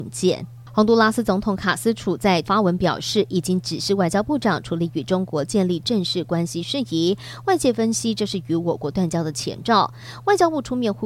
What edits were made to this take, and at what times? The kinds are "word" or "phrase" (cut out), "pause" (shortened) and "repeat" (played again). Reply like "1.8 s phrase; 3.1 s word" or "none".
2.4 s word